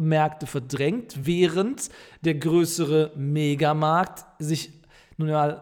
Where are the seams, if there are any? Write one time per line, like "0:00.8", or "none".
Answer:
none